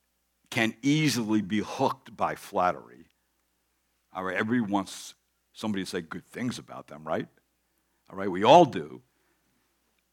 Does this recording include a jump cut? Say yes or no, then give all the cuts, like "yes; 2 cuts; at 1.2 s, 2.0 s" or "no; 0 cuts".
no; 0 cuts